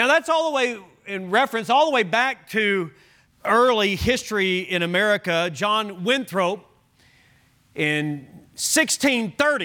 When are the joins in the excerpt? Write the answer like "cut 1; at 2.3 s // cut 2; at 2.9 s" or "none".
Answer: cut 1; at 3.3 s